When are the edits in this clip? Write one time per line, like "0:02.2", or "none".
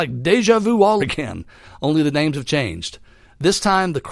0:01.0

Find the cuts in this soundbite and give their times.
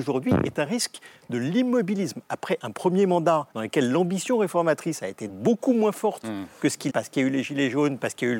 0:03.5
0:05.3
0:06.9

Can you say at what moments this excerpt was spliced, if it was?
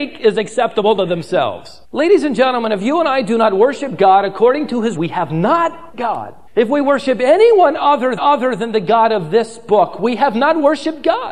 0:01.8
0:05.0
0:05.9
0:06.5
0:08.2

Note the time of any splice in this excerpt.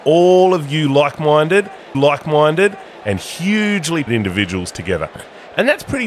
0:01.9
0:04.1

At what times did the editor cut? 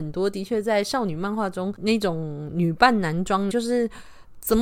0:03.5

